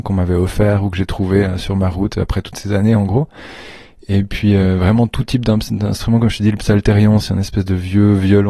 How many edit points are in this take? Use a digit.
0